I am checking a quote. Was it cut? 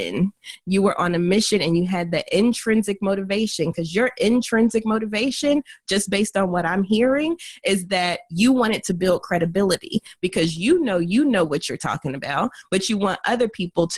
no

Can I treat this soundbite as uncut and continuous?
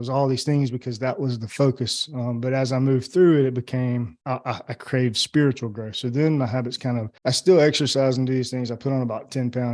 no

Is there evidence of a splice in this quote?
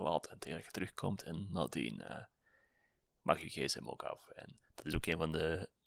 no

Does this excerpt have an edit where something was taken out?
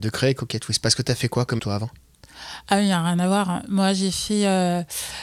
yes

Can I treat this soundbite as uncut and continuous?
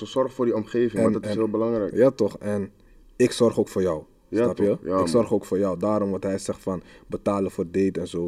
yes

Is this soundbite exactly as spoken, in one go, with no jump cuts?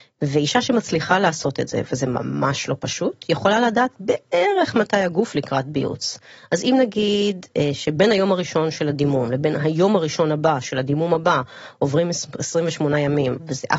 yes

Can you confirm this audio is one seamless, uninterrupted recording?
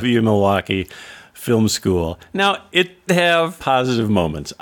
no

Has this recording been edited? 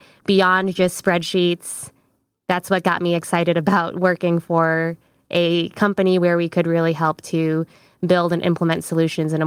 no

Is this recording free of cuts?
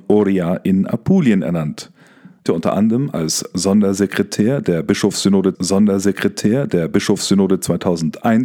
no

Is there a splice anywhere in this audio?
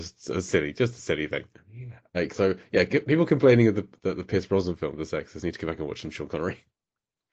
no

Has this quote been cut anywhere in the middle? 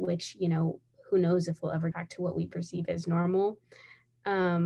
yes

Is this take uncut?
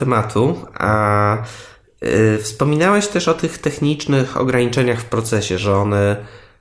yes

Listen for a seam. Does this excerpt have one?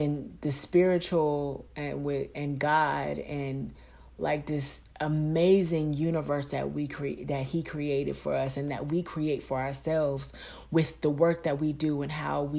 no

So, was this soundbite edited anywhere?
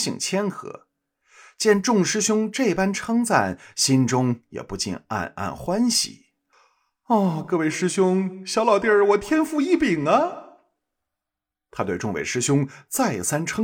no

